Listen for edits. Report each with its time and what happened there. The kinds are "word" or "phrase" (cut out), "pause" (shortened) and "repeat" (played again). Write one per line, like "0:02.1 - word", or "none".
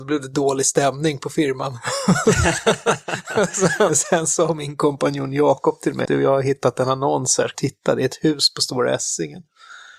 0:03.9 - word
0:06.1 - word
0:07.5 - phrase